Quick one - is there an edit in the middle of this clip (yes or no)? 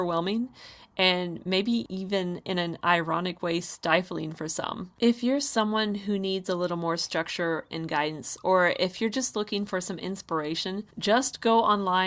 yes